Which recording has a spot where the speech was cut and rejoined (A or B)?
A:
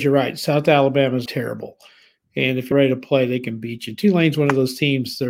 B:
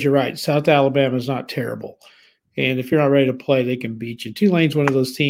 A